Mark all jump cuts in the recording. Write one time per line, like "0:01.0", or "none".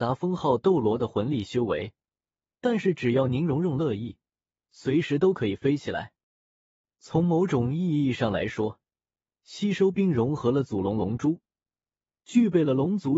none